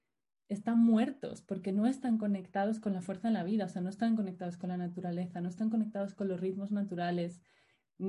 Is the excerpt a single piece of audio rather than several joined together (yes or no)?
yes